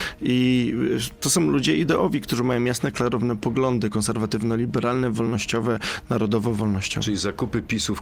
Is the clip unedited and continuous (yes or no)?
yes